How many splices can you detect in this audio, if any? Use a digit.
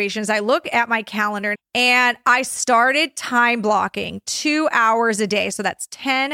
1